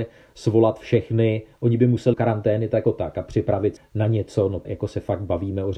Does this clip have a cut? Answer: yes; 4 cuts; at 2.1 s, 2.8 s, 3.8 s, 4.6 s

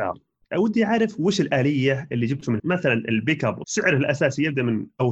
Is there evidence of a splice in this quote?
yes; 2 cuts; at 2.6 s, 3.6 s

